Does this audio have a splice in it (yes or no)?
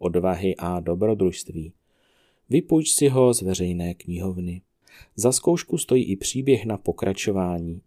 no